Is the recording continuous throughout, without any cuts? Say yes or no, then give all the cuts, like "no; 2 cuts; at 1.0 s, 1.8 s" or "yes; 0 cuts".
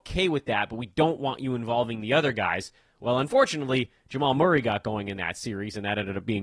yes; 0 cuts